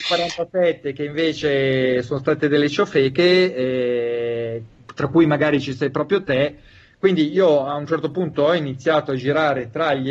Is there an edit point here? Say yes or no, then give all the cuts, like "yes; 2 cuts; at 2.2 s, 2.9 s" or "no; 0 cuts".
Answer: no; 0 cuts